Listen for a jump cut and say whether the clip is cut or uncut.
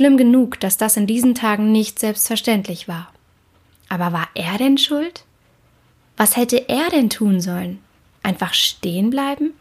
uncut